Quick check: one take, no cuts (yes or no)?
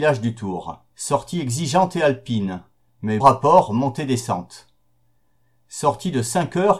no